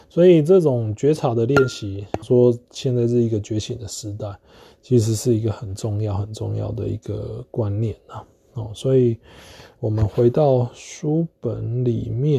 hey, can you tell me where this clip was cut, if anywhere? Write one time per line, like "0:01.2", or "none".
0:02.2

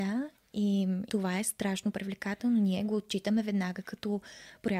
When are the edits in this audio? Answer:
0:01.1

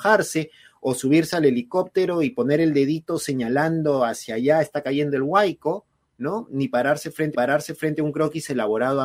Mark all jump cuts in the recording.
0:07.3

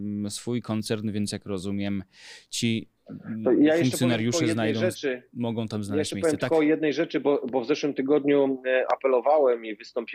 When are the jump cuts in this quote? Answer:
none

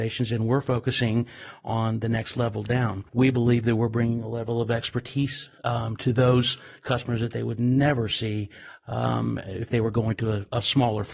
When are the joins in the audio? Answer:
0:03.1
0:05.6

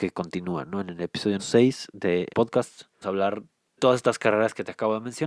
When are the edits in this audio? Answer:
0:01.4
0:02.3
0:03.0
0:03.8

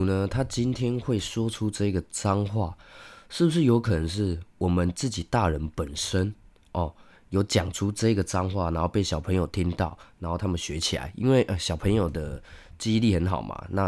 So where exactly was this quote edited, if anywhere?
none

